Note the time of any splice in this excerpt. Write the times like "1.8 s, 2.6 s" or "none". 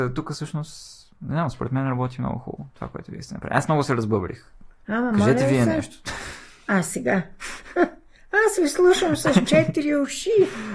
none